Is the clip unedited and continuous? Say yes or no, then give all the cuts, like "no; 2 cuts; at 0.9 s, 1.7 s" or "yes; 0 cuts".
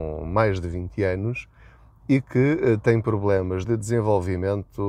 yes; 0 cuts